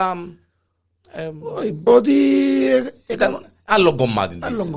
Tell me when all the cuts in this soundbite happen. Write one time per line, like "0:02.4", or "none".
0:01.9